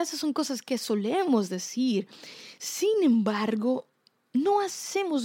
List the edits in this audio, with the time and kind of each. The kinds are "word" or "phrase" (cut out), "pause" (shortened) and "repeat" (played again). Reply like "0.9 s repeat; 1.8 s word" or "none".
none